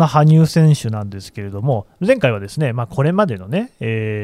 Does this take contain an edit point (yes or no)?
no